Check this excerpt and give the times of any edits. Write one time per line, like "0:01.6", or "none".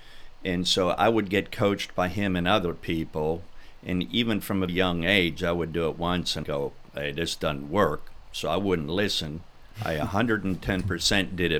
0:04.7
0:06.4

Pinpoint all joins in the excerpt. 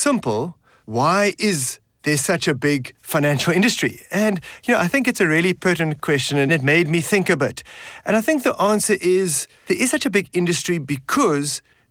0:02.9

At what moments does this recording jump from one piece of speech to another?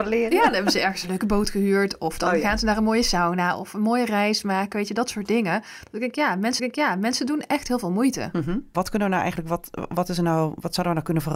0:06.6

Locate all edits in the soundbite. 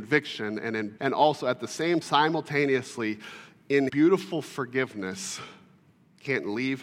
0:01.0
0:02.0
0:03.9

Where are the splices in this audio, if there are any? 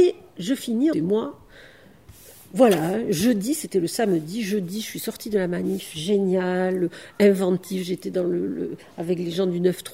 0:00.9

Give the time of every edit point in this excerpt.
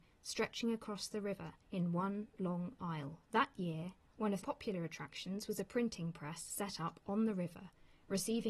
0:01.6
0:03.2
0:04.4

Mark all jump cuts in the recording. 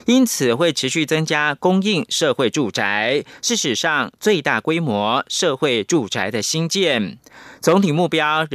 none

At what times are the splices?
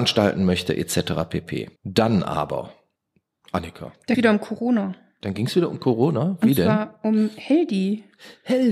0:01.8
0:03.0
0:04.1

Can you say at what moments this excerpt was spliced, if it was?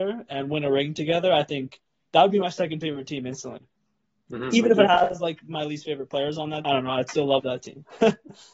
0:06.6

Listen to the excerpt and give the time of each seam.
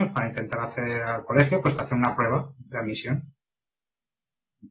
none

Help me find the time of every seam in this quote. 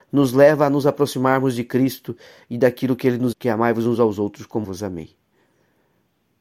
0:03.3
0:04.6

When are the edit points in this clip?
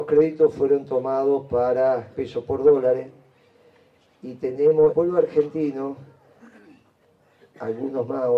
0:02.1
0:04.9

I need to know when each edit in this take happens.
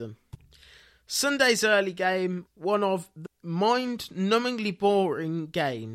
0:02.5
0:03.3

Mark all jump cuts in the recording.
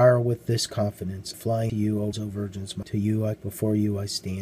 0:01.3
0:01.7
0:02.1
0:02.8
0:03.4

